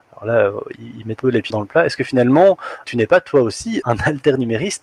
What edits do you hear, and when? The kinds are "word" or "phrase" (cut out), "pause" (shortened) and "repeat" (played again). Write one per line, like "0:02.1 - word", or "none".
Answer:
0:01.2 - word
0:01.5 - word
0:02.8 - word
0:03.8 - word